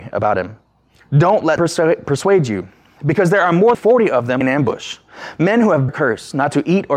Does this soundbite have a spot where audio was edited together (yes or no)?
yes